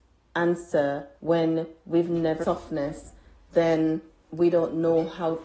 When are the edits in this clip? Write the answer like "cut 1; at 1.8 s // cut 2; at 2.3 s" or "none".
cut 1; at 1.2 s // cut 2; at 2.4 s // cut 3; at 4.3 s